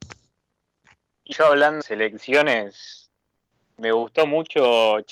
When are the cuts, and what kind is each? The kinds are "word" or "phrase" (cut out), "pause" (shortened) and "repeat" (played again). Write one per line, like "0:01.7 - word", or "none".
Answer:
0:01.3 - word
0:01.8 - word